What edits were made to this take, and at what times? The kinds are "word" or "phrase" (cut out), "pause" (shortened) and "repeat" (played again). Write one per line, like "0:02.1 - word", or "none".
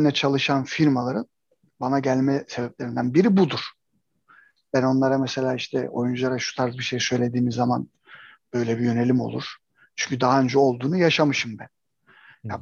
none